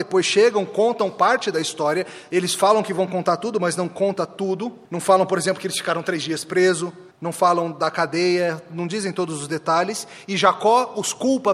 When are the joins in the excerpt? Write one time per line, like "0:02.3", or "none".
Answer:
0:04.9
0:07.1